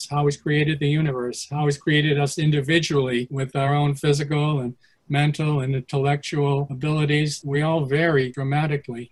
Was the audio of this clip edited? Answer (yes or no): no